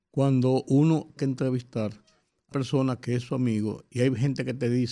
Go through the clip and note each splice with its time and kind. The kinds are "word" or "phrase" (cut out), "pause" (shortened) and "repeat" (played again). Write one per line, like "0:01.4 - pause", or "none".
0:01.2 - word
0:02.5 - word